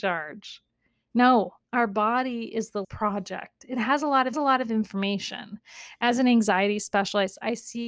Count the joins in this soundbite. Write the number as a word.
three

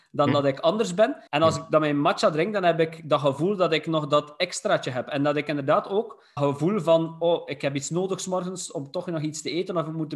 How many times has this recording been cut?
two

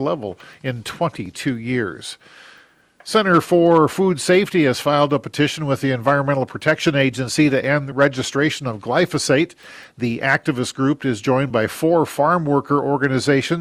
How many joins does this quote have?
zero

